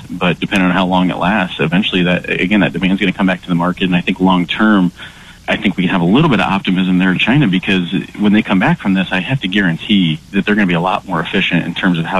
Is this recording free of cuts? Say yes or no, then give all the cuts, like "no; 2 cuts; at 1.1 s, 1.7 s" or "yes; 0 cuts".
no; 2 cuts; at 5.4 s, 7.2 s